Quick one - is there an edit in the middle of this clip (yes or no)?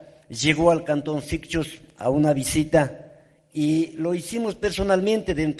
no